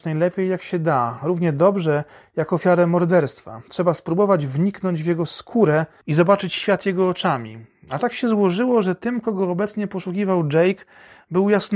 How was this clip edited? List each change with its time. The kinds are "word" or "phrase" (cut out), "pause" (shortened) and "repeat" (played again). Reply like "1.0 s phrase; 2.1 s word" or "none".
none